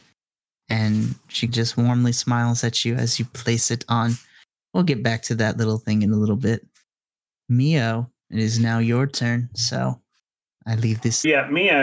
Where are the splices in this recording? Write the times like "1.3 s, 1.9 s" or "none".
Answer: 8.2 s